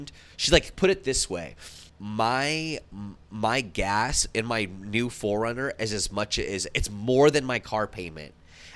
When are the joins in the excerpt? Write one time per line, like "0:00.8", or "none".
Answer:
0:01.9